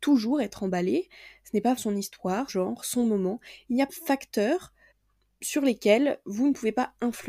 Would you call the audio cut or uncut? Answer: cut